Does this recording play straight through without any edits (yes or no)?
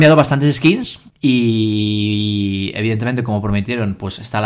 no